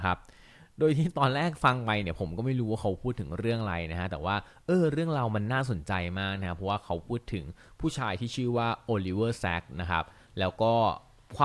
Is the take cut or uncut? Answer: uncut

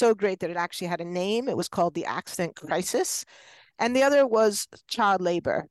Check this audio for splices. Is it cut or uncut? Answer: uncut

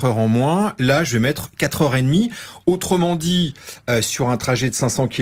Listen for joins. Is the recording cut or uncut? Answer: uncut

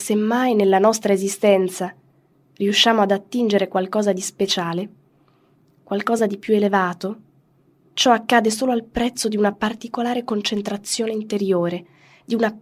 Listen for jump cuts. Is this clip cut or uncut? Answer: uncut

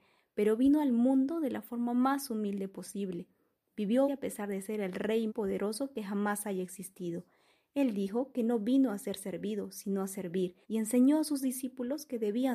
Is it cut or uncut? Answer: cut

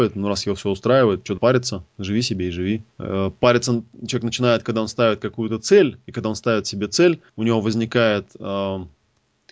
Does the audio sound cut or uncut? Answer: cut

